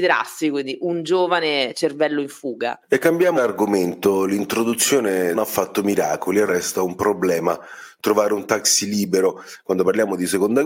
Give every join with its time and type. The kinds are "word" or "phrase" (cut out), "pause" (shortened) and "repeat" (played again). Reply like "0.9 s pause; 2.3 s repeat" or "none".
2.8 s pause; 3.4 s word; 5.3 s phrase; 6.5 s word

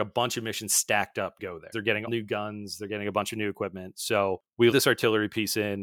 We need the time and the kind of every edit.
1.4 s word; 1.7 s word; 2.1 s word; 4.7 s word

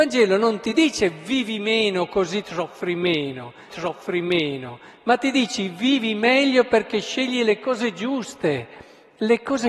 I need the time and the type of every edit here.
3.7 s repeat

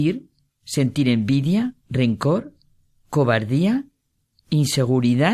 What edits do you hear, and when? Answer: 1.8 s pause

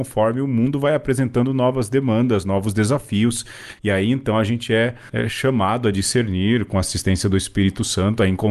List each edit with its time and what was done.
none

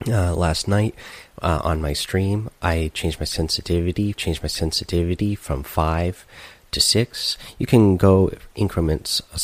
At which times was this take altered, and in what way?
4.1 s repeat

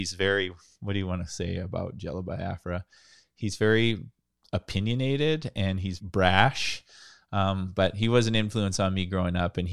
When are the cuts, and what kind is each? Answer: 6.0 s word

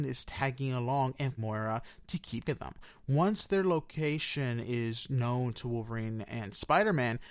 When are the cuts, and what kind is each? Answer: 1.4 s word; 2.4 s word

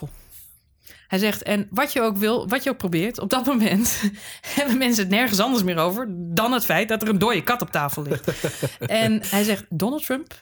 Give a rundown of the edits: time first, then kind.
9.2 s word

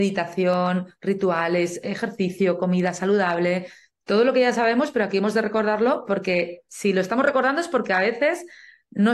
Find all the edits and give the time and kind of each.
none

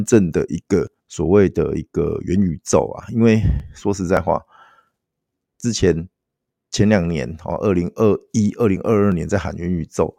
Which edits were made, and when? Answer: 1.0 s pause

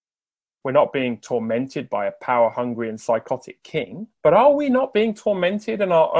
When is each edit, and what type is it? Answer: 4.2 s pause

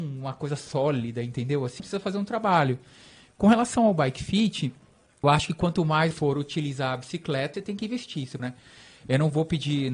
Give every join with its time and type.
1.8 s word; 5.2 s word; 6.1 s word; 7.5 s word; 8.4 s word

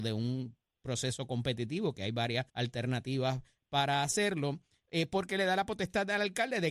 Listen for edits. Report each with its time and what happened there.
2.5 s pause

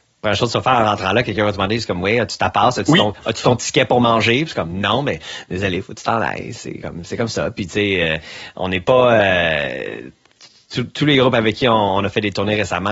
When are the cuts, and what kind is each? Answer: none

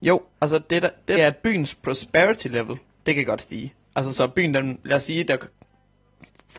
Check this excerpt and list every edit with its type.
1.2 s phrase

